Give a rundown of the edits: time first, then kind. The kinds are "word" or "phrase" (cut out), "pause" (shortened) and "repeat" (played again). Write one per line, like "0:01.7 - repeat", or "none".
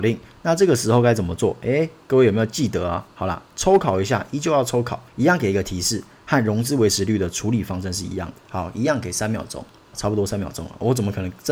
0:05.1 - pause
0:08.4 - pause
0:09.9 - word